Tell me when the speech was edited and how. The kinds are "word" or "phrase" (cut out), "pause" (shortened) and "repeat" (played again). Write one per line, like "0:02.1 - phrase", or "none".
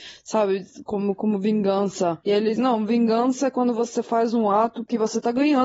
0:02.6 - word

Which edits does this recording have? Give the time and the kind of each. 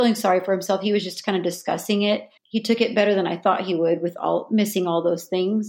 0:02.4 - pause

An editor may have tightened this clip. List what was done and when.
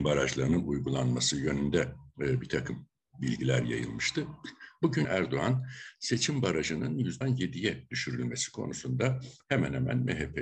0:05.0 - word
0:07.2 - word

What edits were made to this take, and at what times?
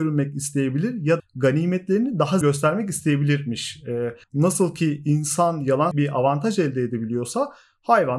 0:01.2 - word
0:02.4 - word
0:04.2 - pause
0:05.9 - word

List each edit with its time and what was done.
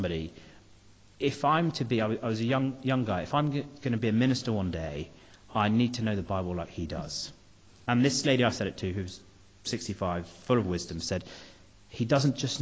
none

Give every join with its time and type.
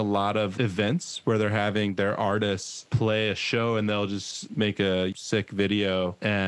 none

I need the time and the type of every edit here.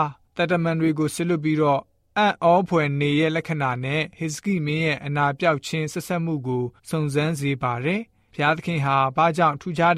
0:06.8 - pause

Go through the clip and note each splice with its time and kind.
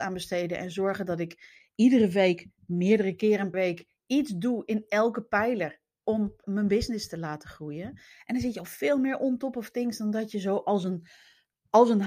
0:03.5 - word
0:06.4 - word

